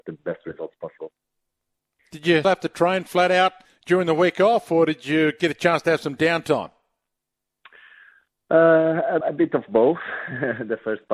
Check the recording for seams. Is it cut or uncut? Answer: cut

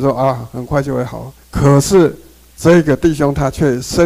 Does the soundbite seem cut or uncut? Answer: cut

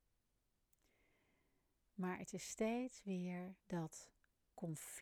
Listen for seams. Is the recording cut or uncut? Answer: cut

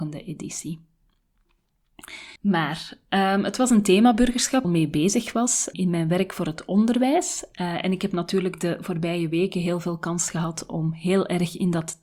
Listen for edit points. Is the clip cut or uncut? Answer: cut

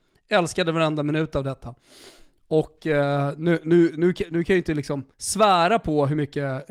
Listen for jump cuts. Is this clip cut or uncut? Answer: cut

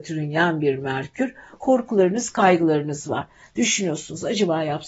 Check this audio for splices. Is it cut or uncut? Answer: uncut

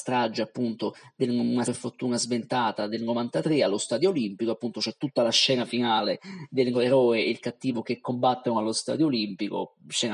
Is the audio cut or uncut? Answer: cut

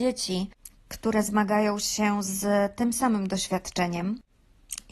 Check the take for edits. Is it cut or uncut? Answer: uncut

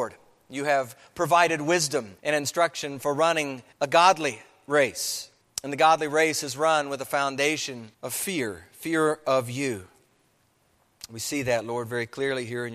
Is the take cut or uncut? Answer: cut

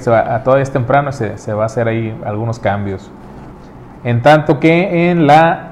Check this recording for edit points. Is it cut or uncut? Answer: uncut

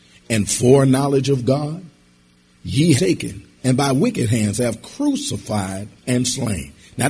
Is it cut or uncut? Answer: cut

